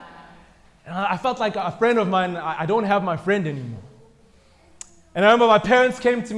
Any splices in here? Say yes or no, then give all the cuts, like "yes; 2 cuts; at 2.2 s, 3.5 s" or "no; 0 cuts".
no; 0 cuts